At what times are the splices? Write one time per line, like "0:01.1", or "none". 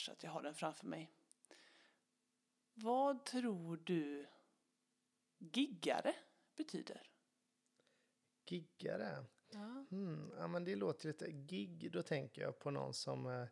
none